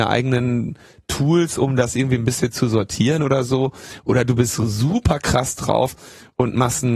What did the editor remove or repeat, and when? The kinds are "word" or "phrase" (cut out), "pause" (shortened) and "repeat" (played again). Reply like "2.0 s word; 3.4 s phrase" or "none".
none